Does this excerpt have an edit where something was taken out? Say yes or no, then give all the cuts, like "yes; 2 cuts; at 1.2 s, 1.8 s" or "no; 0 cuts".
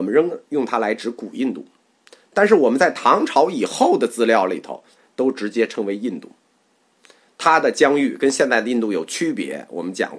no; 0 cuts